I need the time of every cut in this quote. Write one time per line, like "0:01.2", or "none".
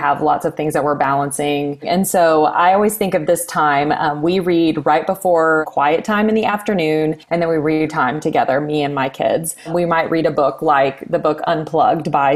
0:07.2
0:07.9